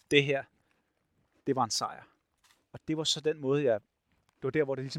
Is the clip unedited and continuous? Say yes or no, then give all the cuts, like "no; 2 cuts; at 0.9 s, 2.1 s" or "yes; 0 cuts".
yes; 0 cuts